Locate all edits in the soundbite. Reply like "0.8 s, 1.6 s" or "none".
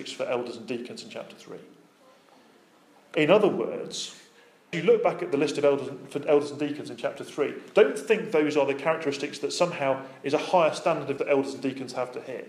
4.7 s, 11.2 s